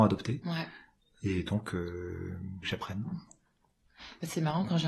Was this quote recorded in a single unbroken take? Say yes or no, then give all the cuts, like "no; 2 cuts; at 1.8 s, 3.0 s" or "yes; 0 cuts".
no; 1 cut; at 2.6 s